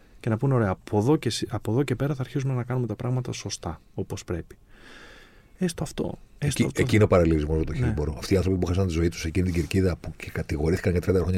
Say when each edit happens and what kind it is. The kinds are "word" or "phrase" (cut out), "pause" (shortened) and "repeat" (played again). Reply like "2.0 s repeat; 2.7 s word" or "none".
none